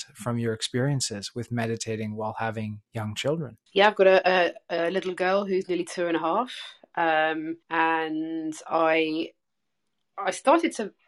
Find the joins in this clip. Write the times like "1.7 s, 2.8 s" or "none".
3.7 s, 7.6 s